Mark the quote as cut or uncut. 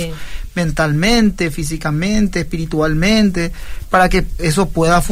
uncut